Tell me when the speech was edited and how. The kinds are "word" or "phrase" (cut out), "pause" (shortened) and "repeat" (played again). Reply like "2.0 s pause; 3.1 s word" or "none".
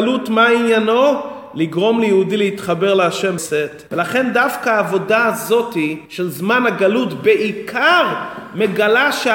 3.4 s word; 3.9 s pause; 6.1 s pause